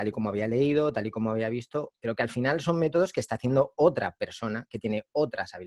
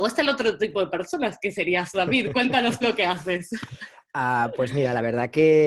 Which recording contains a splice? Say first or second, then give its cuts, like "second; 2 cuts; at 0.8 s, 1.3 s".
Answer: second; 2 cuts; at 1.9 s, 2.8 s